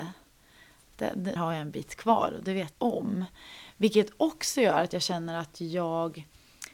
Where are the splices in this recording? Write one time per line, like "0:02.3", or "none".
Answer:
0:01.4
0:02.7